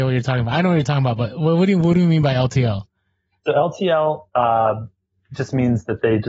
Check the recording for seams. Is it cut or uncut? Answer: uncut